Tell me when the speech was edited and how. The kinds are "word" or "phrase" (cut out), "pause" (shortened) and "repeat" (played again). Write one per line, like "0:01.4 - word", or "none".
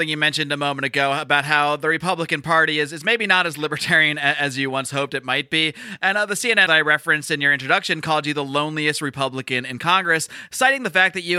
0:06.7 - word